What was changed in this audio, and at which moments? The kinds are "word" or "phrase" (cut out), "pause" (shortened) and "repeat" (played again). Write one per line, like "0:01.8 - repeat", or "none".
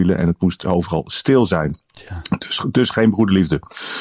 0:01.9 - pause